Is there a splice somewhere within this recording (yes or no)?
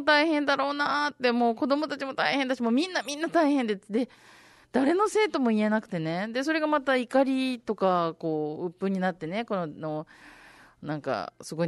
no